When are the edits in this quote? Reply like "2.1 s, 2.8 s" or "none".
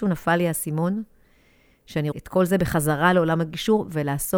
2.1 s